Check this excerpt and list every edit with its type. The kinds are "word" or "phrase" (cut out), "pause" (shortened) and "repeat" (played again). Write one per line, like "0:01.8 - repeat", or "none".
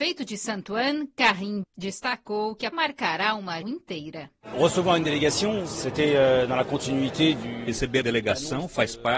0:01.6 - word
0:02.7 - word
0:03.6 - word
0:08.0 - word